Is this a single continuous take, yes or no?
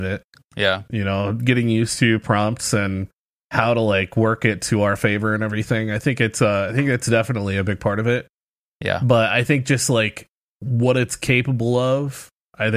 yes